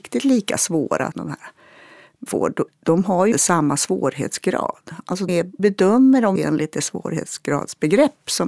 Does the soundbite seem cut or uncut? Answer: cut